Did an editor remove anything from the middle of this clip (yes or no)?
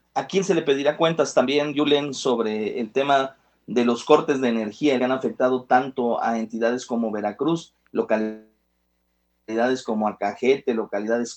yes